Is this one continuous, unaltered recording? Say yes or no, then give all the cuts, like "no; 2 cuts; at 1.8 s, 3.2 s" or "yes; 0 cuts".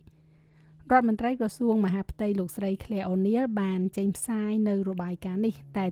yes; 0 cuts